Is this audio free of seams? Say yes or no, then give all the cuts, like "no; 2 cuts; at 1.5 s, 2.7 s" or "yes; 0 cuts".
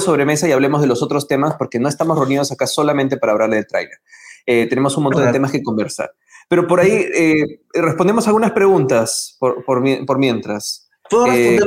yes; 0 cuts